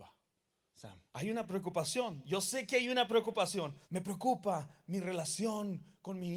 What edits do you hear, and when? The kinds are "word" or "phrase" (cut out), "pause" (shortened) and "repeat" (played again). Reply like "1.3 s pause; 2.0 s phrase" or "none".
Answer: 1.1 s pause; 3.8 s pause